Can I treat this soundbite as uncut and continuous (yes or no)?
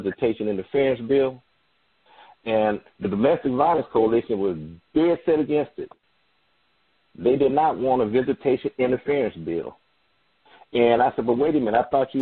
yes